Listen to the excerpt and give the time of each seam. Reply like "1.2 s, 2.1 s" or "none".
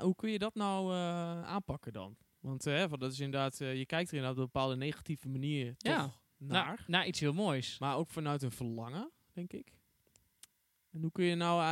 9.2 s